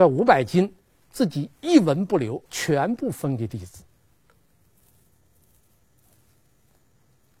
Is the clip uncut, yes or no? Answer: no